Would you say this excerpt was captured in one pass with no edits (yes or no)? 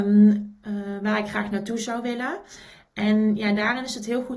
yes